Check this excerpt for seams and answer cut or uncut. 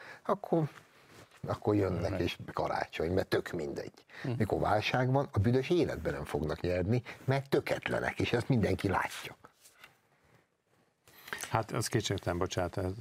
cut